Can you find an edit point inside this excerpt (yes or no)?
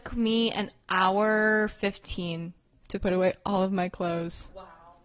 no